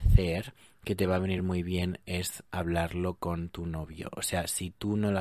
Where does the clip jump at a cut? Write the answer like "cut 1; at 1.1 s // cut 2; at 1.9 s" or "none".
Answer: none